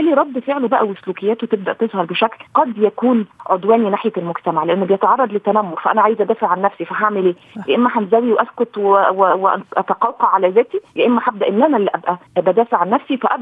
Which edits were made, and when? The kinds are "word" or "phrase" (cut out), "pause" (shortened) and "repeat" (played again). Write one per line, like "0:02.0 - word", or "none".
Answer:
0:02.5 - pause
0:10.9 - pause
0:12.3 - pause